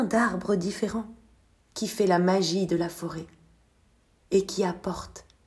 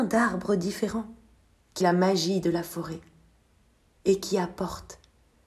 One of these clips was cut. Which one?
second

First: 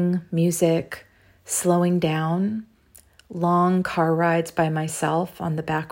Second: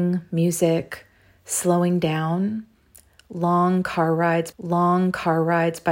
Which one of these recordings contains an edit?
second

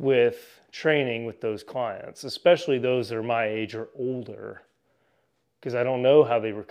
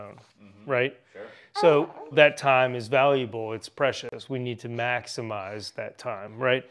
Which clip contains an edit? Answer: second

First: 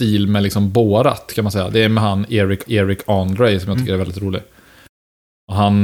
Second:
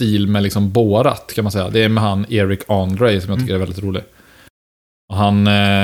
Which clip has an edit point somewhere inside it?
first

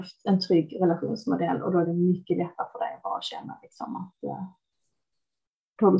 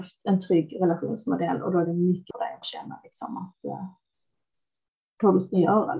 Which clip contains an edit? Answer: second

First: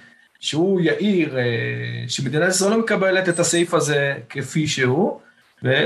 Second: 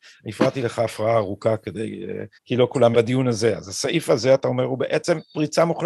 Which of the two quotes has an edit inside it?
second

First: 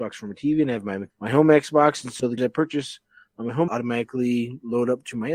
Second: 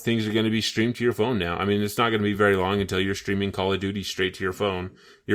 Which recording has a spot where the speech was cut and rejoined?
first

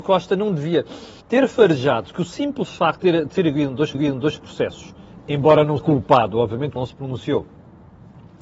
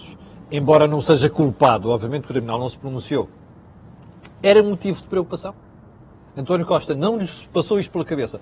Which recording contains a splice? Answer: first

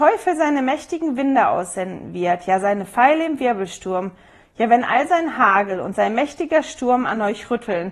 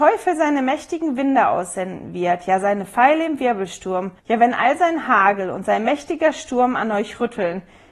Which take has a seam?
second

